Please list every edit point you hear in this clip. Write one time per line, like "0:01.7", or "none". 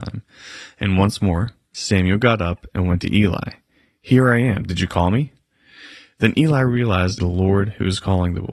0:07.2